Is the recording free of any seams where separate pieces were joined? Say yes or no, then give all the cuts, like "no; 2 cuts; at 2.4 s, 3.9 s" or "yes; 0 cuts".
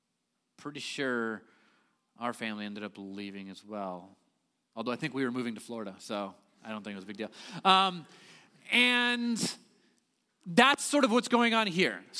yes; 0 cuts